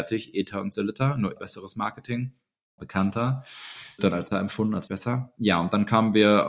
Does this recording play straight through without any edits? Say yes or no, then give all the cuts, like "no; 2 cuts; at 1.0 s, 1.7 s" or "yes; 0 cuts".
no; 5 cuts; at 1.4 s, 2.8 s, 4.0 s, 4.3 s, 4.9 s